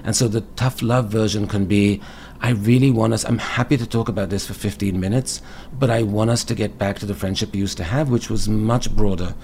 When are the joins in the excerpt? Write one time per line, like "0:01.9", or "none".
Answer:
none